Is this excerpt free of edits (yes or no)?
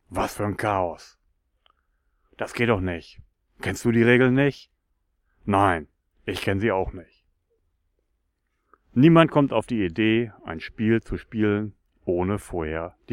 yes